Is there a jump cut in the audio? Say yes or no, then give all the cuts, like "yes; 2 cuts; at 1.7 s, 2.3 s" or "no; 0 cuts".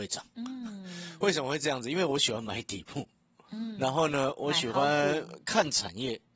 no; 0 cuts